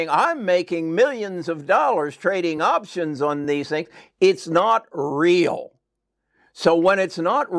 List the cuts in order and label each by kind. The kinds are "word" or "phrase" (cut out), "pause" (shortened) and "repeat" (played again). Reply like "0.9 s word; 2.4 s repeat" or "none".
none